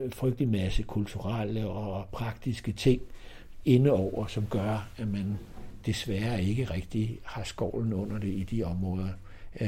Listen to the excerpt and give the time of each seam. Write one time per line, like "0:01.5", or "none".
none